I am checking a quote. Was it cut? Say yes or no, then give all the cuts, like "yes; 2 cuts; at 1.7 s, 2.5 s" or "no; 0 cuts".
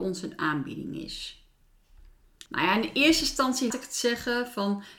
yes; 2 cuts; at 2.5 s, 3.7 s